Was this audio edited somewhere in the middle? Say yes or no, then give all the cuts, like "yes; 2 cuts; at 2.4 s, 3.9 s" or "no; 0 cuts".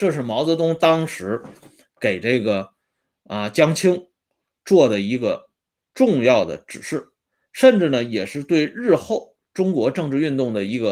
no; 0 cuts